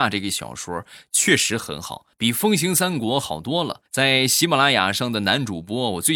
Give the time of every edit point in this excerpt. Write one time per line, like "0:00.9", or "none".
0:02.1
0:03.9